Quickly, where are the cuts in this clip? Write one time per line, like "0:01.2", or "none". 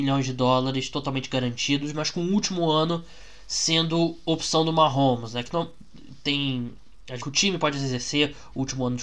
0:07.2